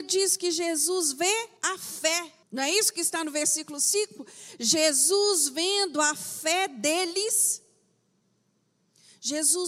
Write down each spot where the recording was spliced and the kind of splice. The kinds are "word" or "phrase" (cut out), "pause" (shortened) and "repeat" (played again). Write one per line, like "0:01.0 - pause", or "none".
0:01.6 - pause
0:02.4 - pause